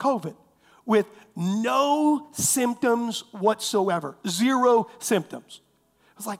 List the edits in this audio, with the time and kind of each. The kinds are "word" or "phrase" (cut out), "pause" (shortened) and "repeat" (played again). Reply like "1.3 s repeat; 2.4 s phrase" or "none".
none